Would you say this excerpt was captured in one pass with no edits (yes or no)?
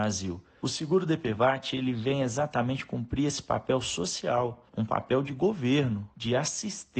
yes